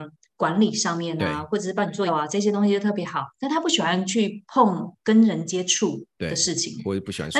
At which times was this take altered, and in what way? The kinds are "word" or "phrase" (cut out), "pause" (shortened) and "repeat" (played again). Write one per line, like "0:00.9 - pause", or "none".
0:02.1 - word